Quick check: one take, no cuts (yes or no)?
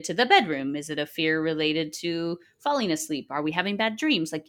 yes